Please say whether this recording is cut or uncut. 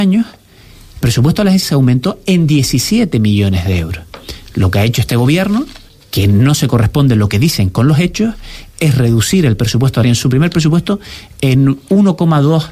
cut